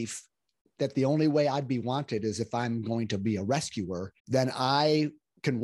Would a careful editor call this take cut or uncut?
cut